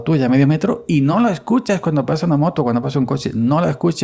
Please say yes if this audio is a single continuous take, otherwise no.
yes